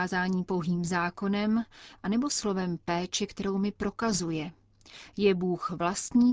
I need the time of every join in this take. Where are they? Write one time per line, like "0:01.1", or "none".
none

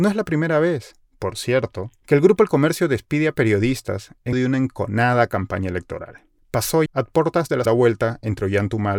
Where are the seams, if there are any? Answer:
0:04.3
0:06.9
0:07.7

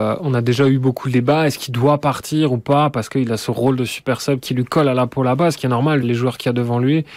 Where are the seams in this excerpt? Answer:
0:04.4
0:06.0

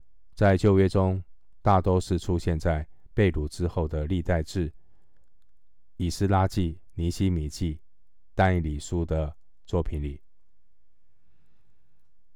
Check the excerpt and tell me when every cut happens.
none

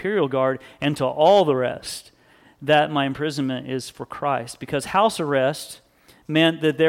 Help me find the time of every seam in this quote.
none

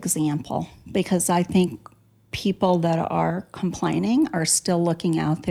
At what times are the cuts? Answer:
none

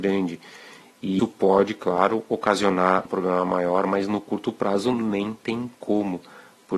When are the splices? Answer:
0:01.2
0:03.1
0:05.7

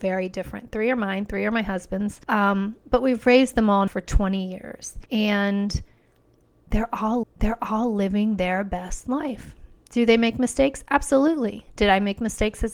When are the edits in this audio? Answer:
0:02.2
0:03.9
0:05.1
0:07.2

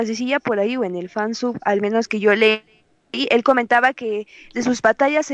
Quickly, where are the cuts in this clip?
none

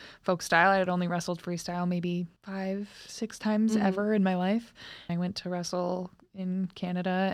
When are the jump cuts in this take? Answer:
0:02.4
0:05.1

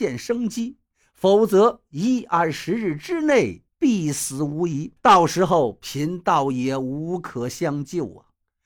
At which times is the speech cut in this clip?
0:03.7
0:05.0

